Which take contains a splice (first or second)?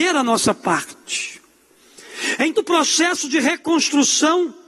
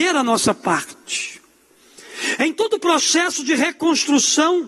first